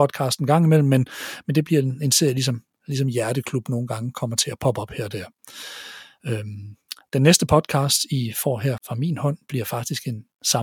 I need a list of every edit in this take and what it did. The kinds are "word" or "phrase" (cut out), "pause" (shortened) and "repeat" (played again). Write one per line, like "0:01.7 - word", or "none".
0:08.8 - word